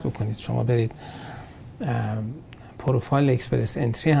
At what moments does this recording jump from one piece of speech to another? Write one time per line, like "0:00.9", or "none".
none